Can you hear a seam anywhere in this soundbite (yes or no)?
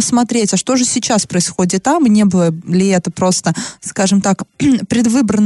no